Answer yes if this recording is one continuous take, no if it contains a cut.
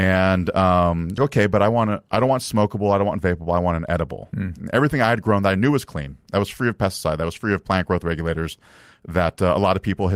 no